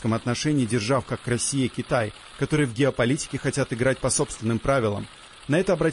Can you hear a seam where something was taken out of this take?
no; 0 cuts

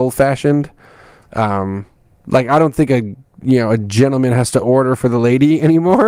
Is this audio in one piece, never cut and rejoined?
yes; 0 cuts

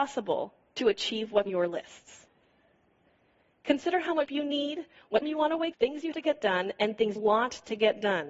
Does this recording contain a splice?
yes; 6 cuts; at 1.5 s, 4.3 s, 5.2 s, 5.7 s, 6.1 s, 7.2 s

